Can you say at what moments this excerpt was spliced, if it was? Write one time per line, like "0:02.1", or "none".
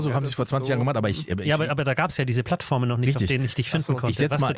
none